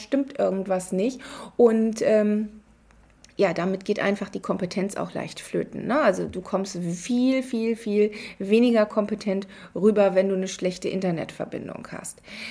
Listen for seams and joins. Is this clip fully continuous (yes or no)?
yes